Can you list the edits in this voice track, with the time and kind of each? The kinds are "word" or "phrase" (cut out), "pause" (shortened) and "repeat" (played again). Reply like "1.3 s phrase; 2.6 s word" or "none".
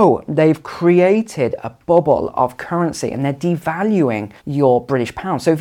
4.4 s pause